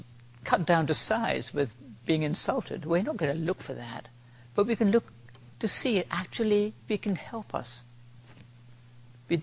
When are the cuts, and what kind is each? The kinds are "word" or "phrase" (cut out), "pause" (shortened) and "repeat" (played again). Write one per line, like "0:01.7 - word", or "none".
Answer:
0:06.9 - word